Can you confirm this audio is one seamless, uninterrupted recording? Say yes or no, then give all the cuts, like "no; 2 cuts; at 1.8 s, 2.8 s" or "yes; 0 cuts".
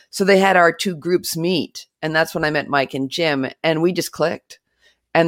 yes; 0 cuts